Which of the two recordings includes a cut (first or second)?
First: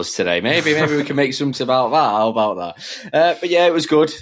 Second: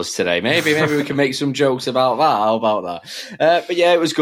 first